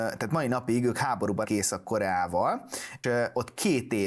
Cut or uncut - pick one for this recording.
cut